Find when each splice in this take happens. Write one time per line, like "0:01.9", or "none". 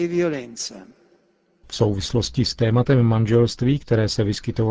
none